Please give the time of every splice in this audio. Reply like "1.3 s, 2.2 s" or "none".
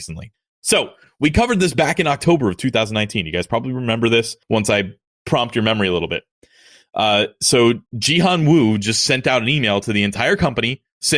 4.4 s, 7.9 s